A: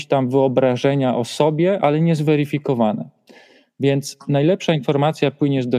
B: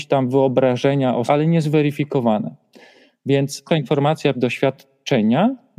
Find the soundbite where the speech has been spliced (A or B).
B